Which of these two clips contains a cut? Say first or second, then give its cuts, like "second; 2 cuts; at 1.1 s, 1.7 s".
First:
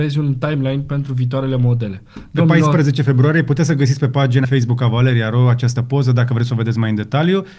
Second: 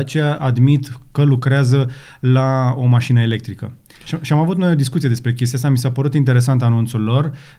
first; 1 cut; at 4.4 s